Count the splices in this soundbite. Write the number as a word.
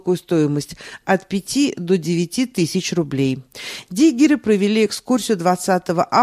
zero